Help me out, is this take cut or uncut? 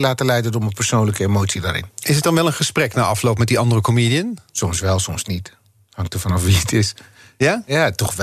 uncut